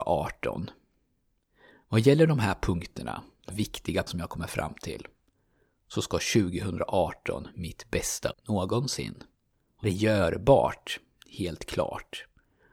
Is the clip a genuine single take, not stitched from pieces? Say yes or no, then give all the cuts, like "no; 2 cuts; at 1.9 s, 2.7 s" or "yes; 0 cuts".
no; 6 cuts; at 3.5 s, 4.1 s, 7.5 s, 8.3 s, 9.5 s, 9.8 s